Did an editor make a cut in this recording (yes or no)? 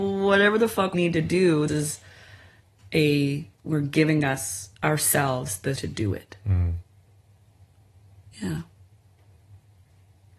yes